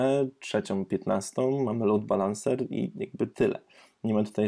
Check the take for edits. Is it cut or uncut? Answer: uncut